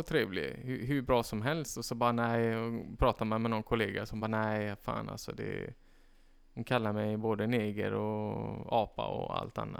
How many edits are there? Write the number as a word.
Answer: zero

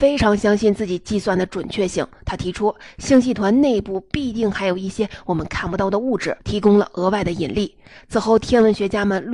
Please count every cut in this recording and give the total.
one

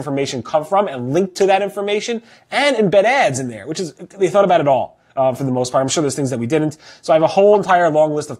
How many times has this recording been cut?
zero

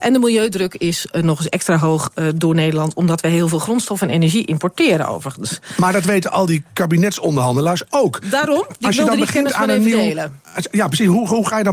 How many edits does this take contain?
zero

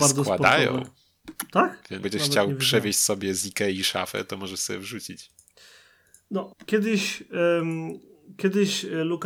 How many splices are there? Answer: two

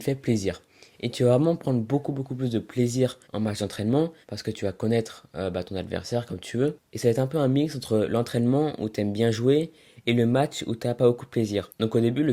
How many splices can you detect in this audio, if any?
three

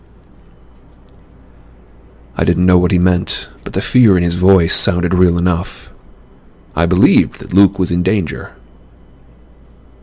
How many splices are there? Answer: zero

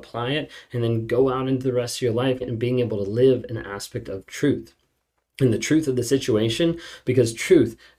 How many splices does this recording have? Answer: one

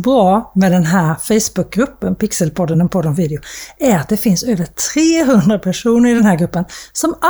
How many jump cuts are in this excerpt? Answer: zero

